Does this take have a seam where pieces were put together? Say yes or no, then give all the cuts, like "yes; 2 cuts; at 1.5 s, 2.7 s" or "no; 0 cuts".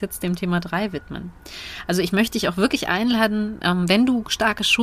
no; 0 cuts